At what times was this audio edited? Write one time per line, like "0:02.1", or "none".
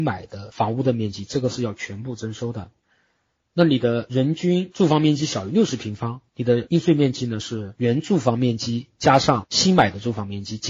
0:06.3